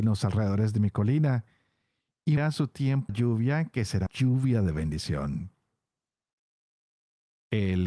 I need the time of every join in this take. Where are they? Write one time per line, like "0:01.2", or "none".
0:02.4
0:03.1
0:04.1

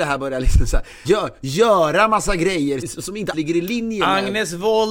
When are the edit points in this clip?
0:01.0
0:02.8
0:03.3

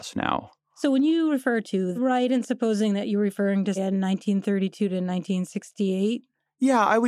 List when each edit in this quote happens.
0:02.0
0:03.8

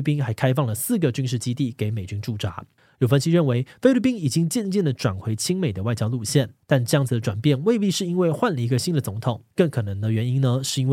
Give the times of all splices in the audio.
0:02.8
0:06.6
0:09.5

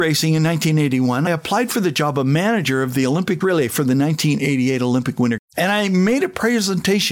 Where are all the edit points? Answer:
0:01.3
0:03.4
0:05.4

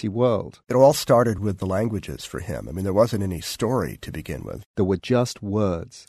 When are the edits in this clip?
none

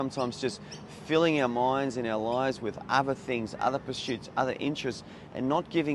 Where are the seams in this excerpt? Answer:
none

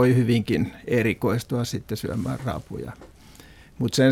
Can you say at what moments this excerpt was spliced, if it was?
none

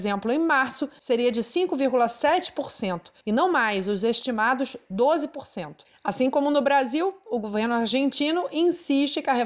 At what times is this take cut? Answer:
none

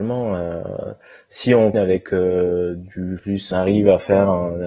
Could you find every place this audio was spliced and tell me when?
0:01.7
0:03.2
0:03.5

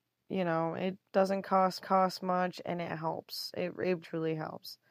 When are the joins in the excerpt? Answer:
0:01.1
0:01.8
0:04.0

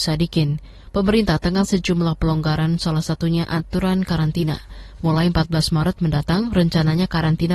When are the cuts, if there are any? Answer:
0:01.6

